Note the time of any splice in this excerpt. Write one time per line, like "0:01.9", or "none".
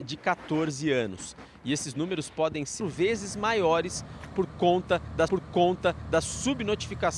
0:02.8
0:05.3